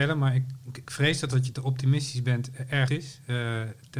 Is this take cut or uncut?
cut